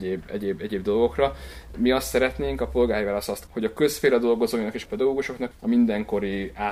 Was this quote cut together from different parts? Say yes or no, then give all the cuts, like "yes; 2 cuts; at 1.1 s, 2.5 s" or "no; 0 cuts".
yes; 3 cuts; at 3.5 s, 4.9 s, 5.5 s